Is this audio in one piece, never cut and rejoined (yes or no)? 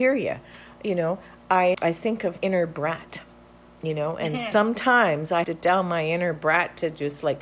no